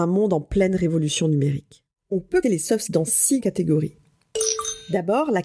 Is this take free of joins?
no; 3 cuts; at 2.4 s, 2.9 s, 3.4 s

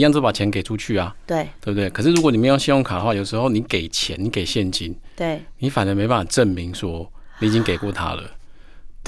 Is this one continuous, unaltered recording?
yes; 0 cuts

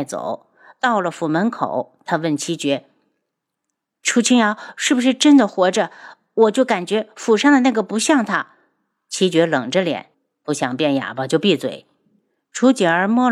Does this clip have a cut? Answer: yes; 1 cut; at 10.1 s

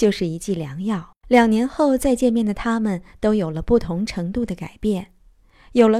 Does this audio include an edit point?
yes; 1 cut; at 1.2 s

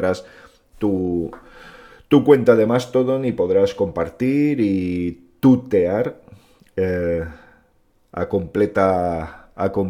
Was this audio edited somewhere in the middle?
no; 0 cuts

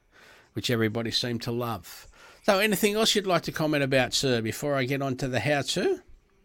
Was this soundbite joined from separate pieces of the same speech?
no; 0 cuts

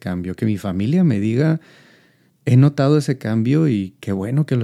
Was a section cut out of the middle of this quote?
no; 0 cuts

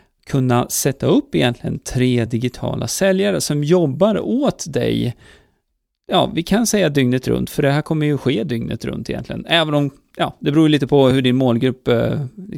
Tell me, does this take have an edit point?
no; 0 cuts

